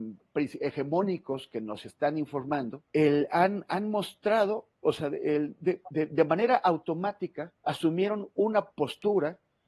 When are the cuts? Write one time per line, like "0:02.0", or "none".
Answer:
0:02.9
0:07.6
0:08.7